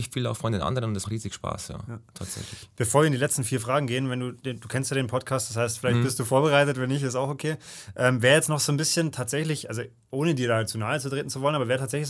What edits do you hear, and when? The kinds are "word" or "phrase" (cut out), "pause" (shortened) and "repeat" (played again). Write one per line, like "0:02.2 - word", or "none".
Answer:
0:01.0 - phrase